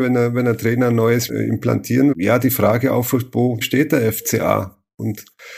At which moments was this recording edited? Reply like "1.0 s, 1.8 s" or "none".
1.3 s, 2.1 s, 3.6 s